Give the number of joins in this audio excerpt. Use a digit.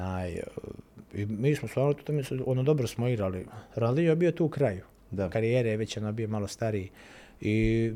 0